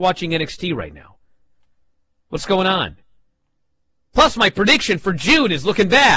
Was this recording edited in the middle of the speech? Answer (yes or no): no